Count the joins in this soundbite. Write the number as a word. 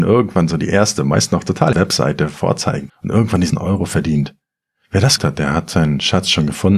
four